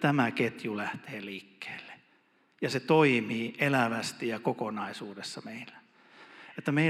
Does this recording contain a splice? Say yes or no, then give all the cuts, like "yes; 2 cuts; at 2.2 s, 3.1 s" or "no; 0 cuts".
no; 0 cuts